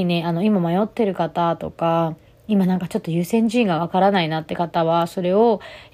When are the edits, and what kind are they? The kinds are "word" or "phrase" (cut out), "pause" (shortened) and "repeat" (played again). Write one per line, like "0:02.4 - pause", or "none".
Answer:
none